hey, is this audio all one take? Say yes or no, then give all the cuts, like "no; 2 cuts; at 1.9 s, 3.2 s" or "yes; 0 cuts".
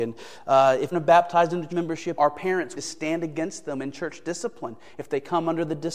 no; 4 cuts; at 0.9 s, 1.7 s, 2.2 s, 2.7 s